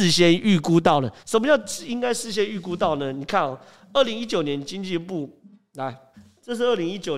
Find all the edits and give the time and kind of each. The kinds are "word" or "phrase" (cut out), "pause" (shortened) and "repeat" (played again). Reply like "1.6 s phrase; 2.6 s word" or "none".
1.2 s pause; 6.1 s pause